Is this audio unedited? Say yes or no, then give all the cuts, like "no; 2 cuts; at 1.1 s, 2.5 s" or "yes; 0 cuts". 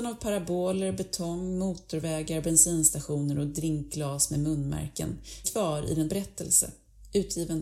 no; 2 cuts; at 5.4 s, 6.1 s